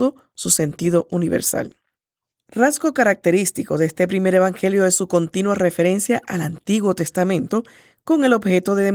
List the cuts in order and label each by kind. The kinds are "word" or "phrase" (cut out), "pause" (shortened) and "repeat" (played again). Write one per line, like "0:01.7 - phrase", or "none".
none